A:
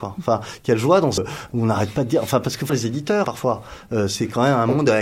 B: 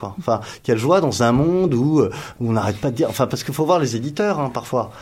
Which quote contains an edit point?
A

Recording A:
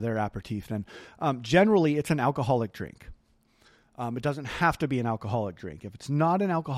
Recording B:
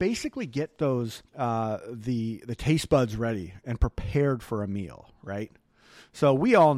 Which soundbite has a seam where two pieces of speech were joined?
B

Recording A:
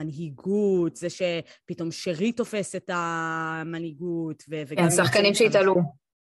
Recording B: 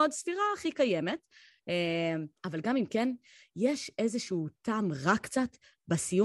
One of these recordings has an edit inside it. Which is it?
B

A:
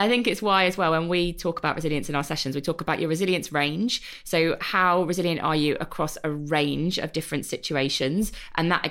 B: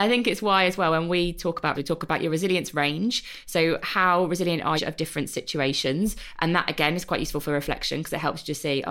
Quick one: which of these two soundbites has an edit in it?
B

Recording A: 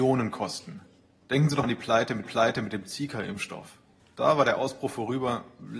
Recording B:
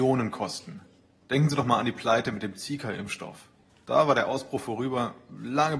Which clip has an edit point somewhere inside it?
A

